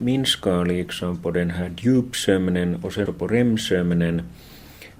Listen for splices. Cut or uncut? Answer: cut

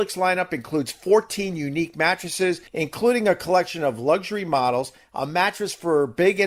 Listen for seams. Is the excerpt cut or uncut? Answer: cut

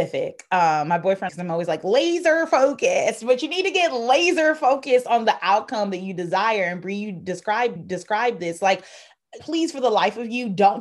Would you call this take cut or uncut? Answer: cut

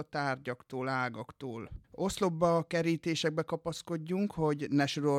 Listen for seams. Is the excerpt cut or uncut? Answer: cut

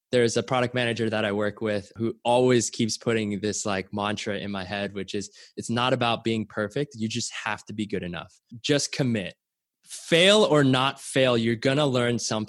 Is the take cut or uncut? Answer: uncut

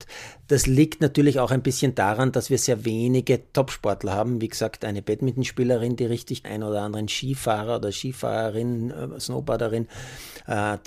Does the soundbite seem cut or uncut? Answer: cut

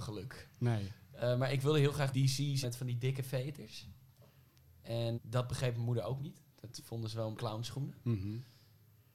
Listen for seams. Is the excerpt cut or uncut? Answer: cut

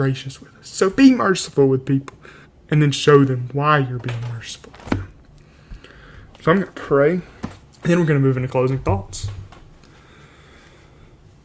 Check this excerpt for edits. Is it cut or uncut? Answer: cut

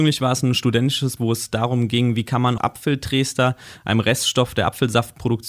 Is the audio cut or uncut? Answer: cut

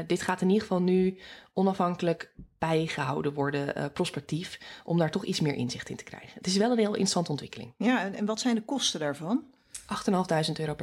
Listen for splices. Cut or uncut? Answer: uncut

